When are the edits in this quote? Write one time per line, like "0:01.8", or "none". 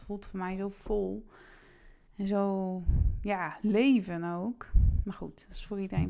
0:02.1